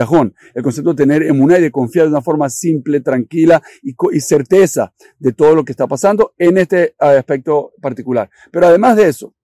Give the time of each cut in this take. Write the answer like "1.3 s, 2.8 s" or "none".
none